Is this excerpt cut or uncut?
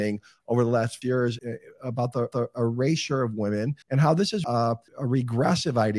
cut